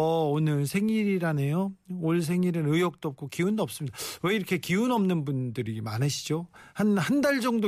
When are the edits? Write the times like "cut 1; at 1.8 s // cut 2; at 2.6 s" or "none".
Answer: none